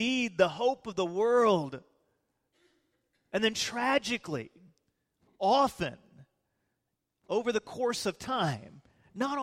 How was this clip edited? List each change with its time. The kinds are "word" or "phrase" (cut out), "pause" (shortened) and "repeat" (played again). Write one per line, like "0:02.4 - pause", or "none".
none